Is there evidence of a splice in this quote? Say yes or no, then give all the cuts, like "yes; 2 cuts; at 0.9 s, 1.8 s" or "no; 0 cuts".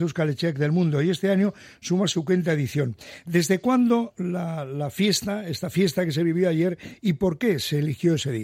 no; 0 cuts